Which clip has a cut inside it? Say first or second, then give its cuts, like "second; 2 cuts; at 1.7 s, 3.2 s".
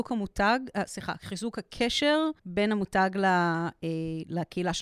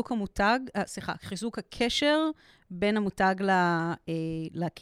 first; 1 cut; at 2.4 s